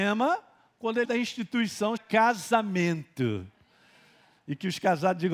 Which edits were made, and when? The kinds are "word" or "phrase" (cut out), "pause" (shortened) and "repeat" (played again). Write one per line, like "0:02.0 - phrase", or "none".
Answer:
0:01.0 - phrase
0:02.0 - word

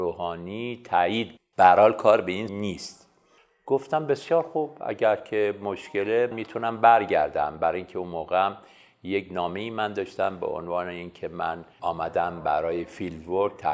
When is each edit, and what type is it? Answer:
0:01.4 - word
0:02.5 - word
0:06.3 - word
0:11.7 - pause

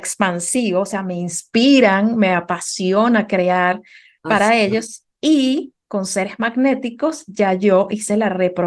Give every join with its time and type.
none

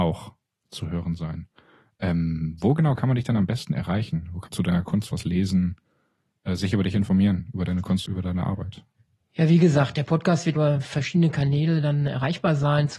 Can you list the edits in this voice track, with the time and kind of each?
0:04.5 - word
0:08.1 - word
0:10.6 - word

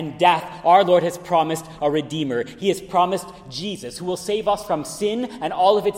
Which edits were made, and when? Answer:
none

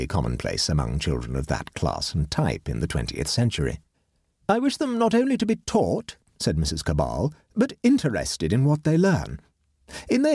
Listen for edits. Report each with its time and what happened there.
0:03.9 - pause

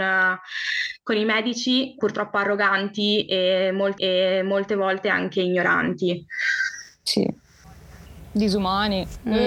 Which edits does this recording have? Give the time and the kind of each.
0:02.0 - word
0:04.0 - repeat

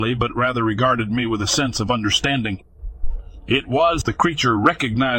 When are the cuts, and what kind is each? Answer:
0:04.0 - phrase

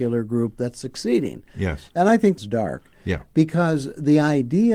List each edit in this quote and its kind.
0:02.4 - word

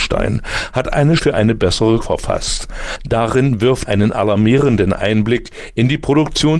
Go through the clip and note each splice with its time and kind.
0:01.2 - word
0:02.0 - word
0:03.8 - word

